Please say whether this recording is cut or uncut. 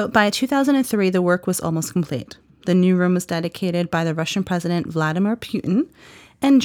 uncut